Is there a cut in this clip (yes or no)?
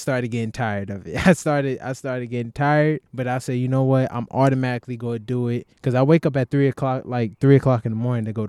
yes